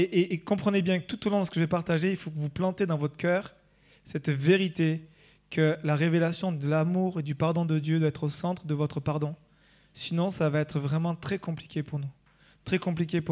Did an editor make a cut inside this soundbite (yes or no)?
no